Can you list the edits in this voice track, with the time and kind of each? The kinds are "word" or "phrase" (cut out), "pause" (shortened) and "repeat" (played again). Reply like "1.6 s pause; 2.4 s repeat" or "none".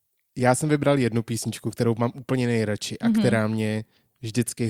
none